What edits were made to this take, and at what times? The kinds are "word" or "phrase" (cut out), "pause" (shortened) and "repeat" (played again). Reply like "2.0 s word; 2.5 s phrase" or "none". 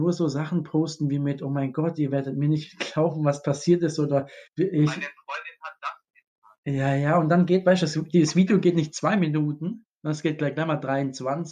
4.5 s pause